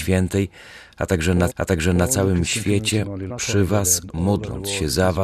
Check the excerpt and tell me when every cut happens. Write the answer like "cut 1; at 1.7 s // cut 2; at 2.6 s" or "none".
cut 1; at 1.5 s // cut 2; at 3.3 s

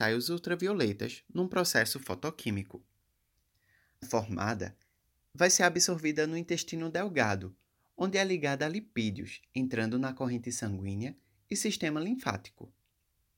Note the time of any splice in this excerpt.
cut 1; at 4.0 s

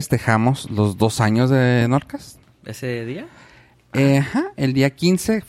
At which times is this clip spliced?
none

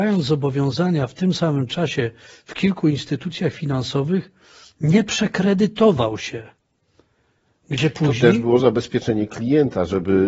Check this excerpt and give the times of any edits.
none

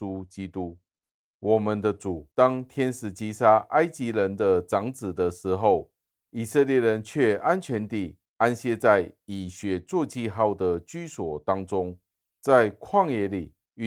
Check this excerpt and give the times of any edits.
cut 1; at 2.3 s

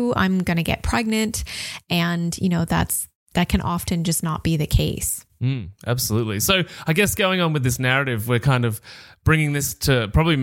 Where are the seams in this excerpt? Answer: none

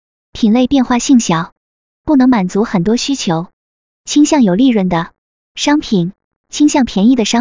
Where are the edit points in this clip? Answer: none

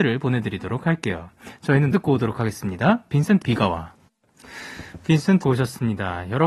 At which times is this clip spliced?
cut 1; at 1.9 s // cut 2; at 3.4 s // cut 3; at 5.4 s

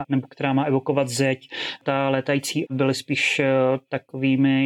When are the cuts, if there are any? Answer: cut 1; at 2.7 s

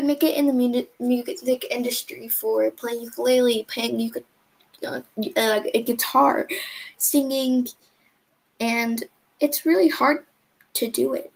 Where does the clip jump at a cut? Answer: none

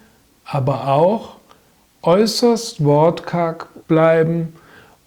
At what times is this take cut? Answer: cut 1; at 3.8 s

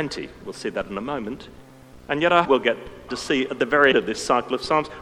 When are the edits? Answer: cut 1; at 2.4 s // cut 2; at 3.1 s // cut 3; at 3.9 s

